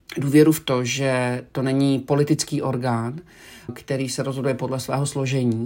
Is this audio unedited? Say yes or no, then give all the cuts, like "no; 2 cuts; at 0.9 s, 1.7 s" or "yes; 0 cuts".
no; 1 cut; at 3.7 s